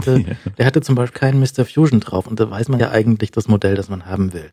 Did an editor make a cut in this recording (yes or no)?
yes